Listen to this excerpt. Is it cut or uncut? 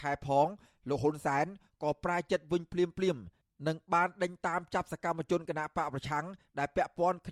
uncut